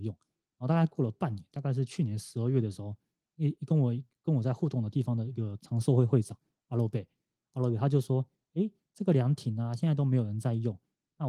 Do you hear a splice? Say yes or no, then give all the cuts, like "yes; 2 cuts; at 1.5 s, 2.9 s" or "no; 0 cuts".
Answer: no; 0 cuts